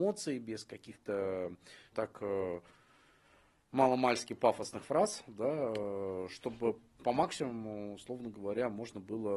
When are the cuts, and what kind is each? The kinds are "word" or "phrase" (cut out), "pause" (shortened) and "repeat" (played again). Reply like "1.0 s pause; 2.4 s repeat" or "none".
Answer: 1.9 s word